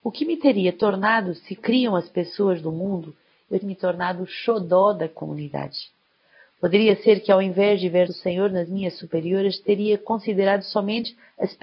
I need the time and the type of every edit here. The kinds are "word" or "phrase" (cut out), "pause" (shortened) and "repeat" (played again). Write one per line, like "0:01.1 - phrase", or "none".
0:01.6 - word
0:03.6 - word
0:08.1 - word